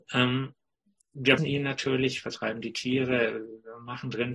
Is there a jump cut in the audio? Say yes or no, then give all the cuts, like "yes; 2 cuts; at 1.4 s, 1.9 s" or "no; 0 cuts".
yes; 1 cut; at 1.4 s